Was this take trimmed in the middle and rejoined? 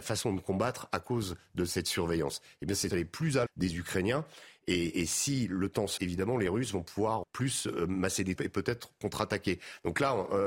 yes; 5 cuts; at 2.9 s, 3.5 s, 6.0 s, 7.2 s, 8.4 s

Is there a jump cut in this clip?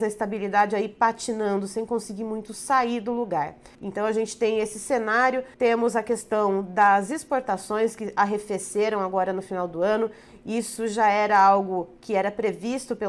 yes; 2 cuts; at 3.7 s, 5.5 s

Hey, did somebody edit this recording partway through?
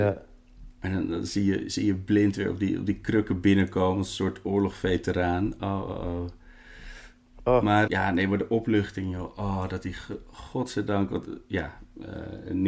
yes; 1 cut; at 7.9 s

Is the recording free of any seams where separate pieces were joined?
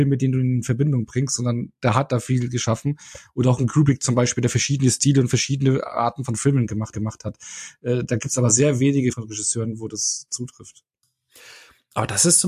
no; 2 cuts; at 6.9 s, 9.1 s

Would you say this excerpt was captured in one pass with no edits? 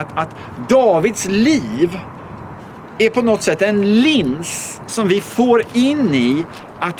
yes; 0 cuts

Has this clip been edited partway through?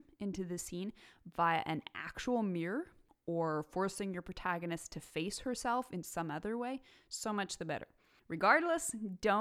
no; 0 cuts

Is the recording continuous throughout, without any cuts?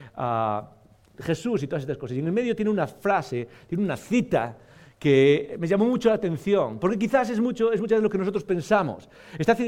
yes; 0 cuts

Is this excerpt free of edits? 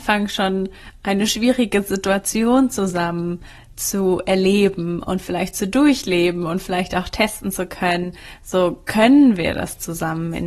yes; 0 cuts

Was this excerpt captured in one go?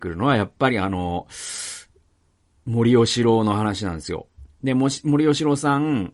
yes; 0 cuts

